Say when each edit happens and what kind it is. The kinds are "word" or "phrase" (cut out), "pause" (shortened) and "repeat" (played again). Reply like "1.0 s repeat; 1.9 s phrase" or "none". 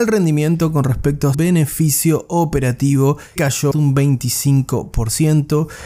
1.3 s word; 3.4 s word; 3.7 s word